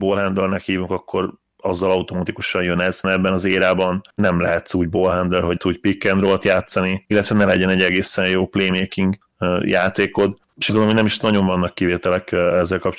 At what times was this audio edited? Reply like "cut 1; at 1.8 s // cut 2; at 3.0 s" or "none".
cut 1; at 3.0 s // cut 2; at 4.1 s // cut 3; at 5.6 s // cut 4; at 10.7 s